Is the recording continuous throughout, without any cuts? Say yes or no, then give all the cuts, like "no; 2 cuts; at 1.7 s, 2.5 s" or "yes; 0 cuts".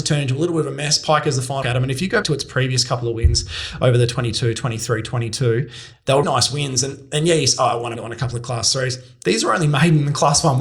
no; 4 cuts; at 1.6 s, 2.2 s, 6.2 s, 7.9 s